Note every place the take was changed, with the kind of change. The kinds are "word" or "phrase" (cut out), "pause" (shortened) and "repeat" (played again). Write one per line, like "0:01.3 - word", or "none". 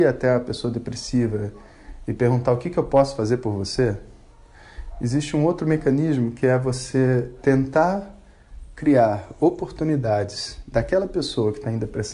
none